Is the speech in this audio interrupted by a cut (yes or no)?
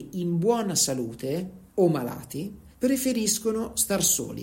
yes